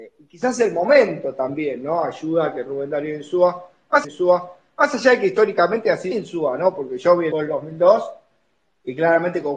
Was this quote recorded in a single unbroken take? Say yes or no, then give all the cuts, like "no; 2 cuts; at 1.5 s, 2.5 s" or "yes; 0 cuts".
no; 3 cuts; at 4.0 s, 6.1 s, 7.3 s